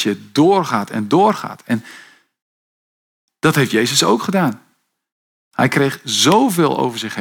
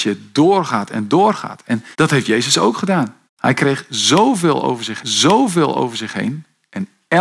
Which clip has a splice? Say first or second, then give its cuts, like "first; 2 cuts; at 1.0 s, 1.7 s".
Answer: second; 3 cuts; at 1.9 s, 3.3 s, 5.0 s